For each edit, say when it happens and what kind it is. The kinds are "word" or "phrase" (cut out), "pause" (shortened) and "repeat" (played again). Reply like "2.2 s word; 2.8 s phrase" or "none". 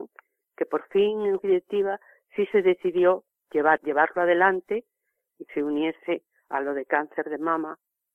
1.4 s word; 3.8 s word; 5.5 s word